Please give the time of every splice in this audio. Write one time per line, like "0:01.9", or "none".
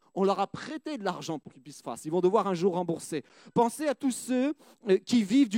0:01.8